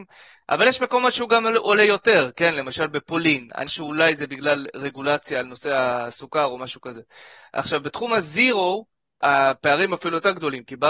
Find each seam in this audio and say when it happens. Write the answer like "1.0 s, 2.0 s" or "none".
3.7 s